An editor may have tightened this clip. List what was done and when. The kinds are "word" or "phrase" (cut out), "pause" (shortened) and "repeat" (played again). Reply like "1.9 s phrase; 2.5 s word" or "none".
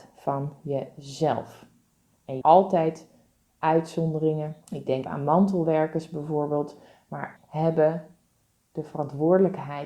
2.4 s phrase; 4.6 s pause; 5.0 s word; 7.4 s phrase